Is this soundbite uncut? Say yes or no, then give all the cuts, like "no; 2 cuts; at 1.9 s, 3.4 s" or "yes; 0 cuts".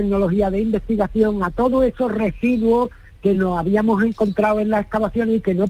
yes; 0 cuts